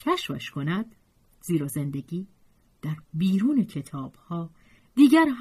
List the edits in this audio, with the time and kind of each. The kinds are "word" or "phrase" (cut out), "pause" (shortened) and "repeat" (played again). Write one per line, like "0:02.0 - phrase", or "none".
none